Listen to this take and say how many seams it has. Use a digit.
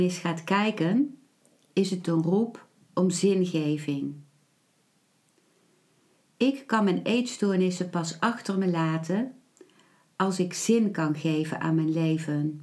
0